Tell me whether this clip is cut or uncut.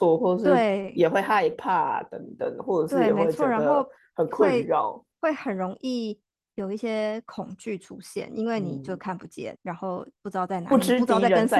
cut